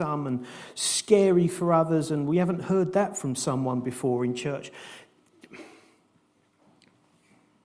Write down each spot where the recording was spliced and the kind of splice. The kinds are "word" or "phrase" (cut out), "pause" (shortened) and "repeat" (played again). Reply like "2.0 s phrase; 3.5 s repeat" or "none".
none